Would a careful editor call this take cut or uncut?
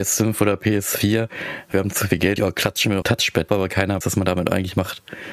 cut